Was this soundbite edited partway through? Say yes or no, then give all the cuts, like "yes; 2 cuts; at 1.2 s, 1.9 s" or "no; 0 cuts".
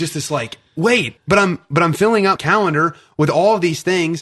yes; 2 cuts; at 1.2 s, 2.4 s